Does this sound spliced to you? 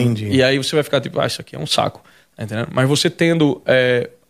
no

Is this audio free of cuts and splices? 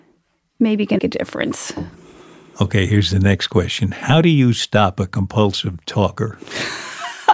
no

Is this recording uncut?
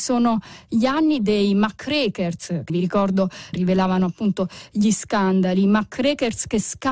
no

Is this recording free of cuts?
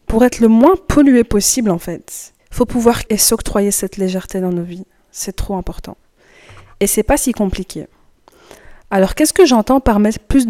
no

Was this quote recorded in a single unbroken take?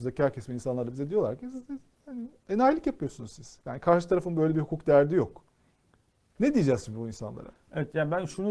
yes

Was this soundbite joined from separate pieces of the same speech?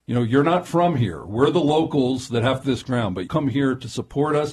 yes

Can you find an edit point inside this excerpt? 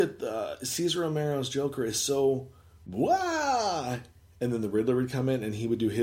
no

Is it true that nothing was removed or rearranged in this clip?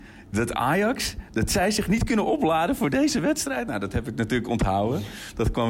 yes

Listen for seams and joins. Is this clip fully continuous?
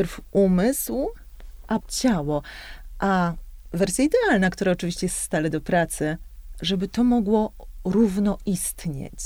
no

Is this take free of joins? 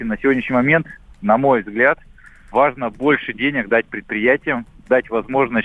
yes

